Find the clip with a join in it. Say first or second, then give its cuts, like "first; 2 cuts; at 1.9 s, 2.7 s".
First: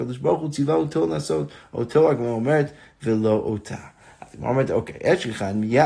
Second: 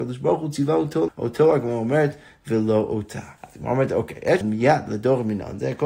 second; 3 cuts; at 1.1 s, 3.4 s, 4.4 s